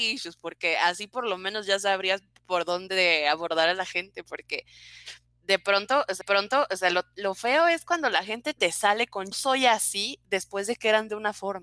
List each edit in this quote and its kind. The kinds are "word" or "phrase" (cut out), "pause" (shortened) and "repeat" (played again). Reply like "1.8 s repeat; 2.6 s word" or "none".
6.2 s repeat; 9.3 s word